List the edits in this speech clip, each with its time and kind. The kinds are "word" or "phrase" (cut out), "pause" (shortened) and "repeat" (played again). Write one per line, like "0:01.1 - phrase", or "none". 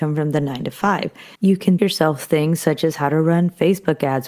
0:01.4 - pause
0:01.8 - word